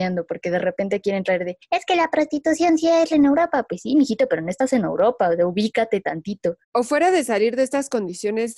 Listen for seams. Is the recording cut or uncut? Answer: cut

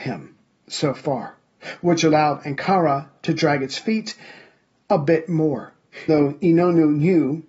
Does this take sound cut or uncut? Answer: cut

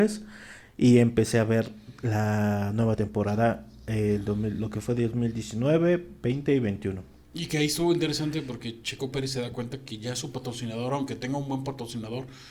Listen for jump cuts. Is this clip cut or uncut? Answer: uncut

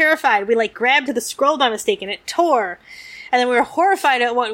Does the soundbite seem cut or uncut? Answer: cut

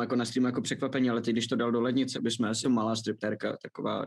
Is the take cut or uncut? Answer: cut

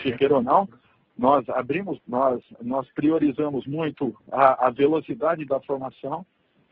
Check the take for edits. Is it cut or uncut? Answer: cut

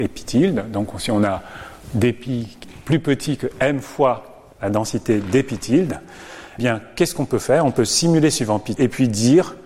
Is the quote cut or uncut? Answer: cut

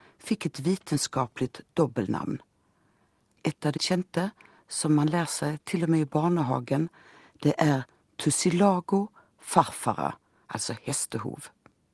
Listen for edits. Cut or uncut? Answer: cut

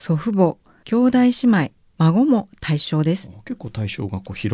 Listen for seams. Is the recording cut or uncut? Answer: uncut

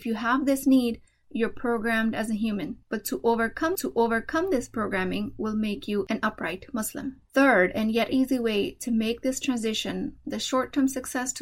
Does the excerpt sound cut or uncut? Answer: cut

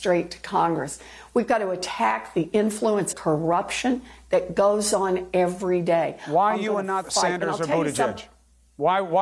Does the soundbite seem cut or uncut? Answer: cut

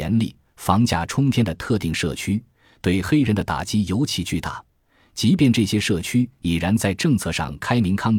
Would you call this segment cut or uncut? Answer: uncut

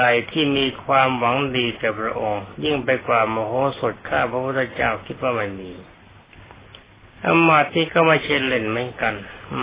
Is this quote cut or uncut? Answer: uncut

